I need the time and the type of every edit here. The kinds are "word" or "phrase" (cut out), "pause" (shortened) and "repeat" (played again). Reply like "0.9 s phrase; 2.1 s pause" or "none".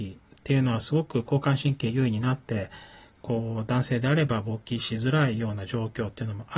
none